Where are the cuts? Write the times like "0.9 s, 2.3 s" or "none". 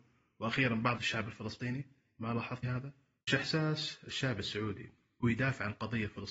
1.0 s, 2.6 s, 3.3 s, 5.2 s